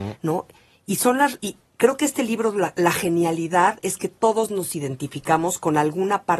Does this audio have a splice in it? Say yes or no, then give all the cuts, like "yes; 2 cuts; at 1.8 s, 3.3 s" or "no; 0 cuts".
yes; 1 cut; at 1.4 s